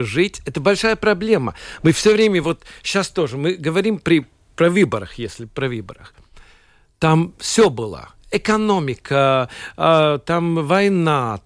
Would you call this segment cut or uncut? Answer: uncut